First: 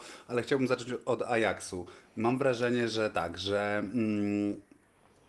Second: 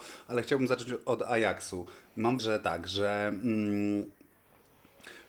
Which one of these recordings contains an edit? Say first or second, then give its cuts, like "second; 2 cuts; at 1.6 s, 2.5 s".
second; 1 cut; at 2.4 s